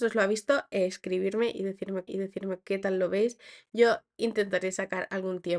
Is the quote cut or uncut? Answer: cut